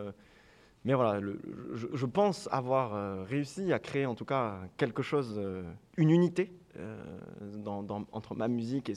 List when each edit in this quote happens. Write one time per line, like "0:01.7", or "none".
0:01.9
0:05.9